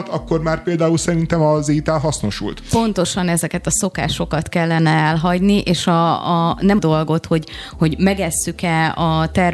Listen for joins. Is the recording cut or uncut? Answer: cut